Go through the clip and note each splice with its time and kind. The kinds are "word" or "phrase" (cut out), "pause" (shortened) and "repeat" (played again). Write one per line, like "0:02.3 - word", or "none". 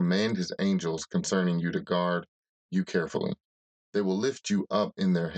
none